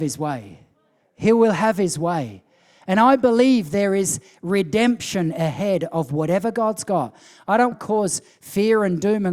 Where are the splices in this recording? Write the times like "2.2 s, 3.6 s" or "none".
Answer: 7.7 s